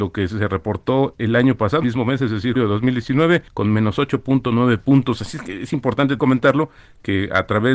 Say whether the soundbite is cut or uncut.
cut